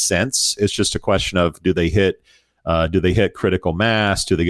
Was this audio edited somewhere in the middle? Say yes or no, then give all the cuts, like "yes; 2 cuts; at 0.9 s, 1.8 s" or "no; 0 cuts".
no; 0 cuts